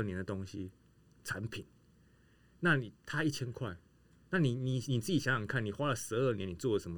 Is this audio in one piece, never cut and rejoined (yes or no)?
yes